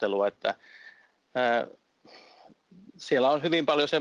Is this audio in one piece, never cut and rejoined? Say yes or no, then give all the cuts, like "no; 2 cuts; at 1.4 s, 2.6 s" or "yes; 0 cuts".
yes; 0 cuts